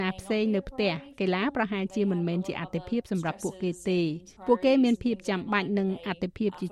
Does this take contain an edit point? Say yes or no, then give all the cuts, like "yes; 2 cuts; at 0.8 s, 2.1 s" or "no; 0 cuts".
yes; 1 cut; at 4.4 s